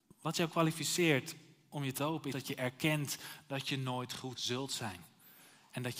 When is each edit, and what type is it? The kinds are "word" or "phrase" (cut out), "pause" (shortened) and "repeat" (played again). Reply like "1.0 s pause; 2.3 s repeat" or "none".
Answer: 2.0 s word; 2.3 s word; 4.3 s word

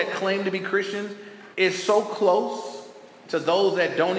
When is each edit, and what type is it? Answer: 1.5 s pause

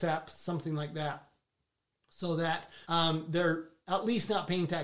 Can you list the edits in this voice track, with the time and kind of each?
2.8 s pause

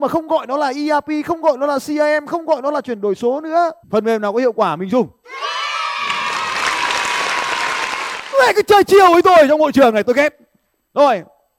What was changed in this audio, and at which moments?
3.8 s pause

